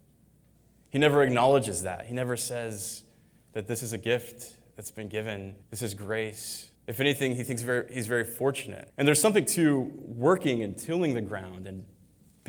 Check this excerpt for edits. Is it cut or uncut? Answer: cut